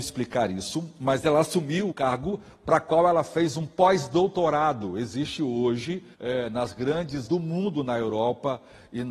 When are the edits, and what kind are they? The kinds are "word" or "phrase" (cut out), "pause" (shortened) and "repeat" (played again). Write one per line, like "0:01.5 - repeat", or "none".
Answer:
0:01.9 - word
0:06.1 - pause
0:07.3 - word